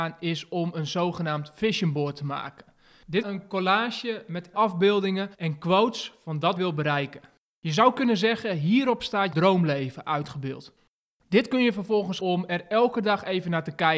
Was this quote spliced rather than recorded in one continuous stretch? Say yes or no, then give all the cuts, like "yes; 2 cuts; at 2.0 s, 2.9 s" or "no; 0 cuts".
yes; 6 cuts; at 3.2 s, 4.5 s, 5.3 s, 6.6 s, 9.3 s, 12.2 s